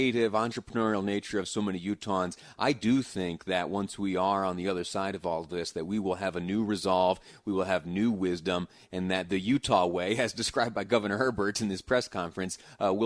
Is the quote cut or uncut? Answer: uncut